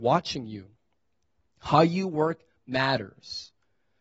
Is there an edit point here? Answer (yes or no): no